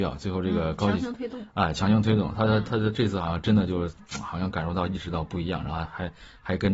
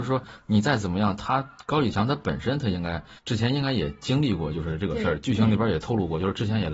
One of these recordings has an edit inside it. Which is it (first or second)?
second